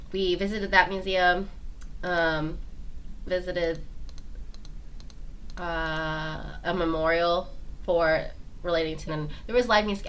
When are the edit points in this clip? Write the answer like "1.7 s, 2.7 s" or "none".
3.3 s, 6.6 s, 9.1 s